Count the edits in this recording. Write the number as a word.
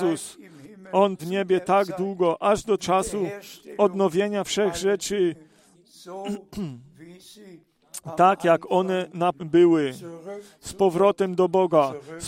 three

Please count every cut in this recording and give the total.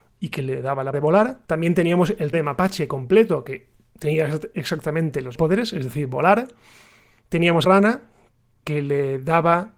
six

